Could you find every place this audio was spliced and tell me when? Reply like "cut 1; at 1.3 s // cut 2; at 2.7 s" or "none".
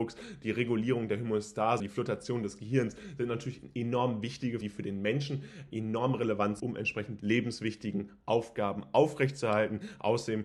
cut 1; at 1.8 s // cut 2; at 4.6 s // cut 3; at 6.6 s // cut 4; at 7.2 s